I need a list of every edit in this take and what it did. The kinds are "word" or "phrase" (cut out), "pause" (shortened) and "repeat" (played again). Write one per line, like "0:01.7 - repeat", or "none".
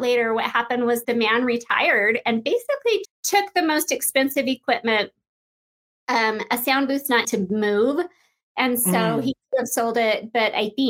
0:01.0 - word
0:03.0 - word
0:07.2 - word